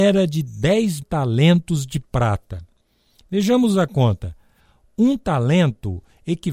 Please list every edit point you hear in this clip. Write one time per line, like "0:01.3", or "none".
0:01.0